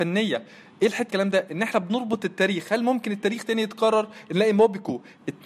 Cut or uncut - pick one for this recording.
cut